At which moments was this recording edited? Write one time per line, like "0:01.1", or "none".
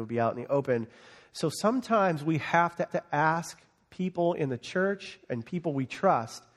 0:02.9